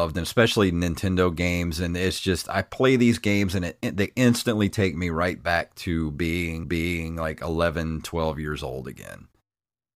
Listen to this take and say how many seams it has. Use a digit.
1